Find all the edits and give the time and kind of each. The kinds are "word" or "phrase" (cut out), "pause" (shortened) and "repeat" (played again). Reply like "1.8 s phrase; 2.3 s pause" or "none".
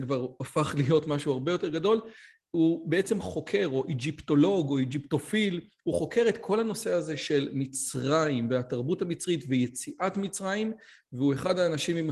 none